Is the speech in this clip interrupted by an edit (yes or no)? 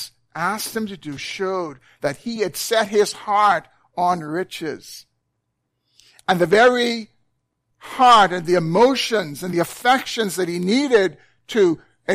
no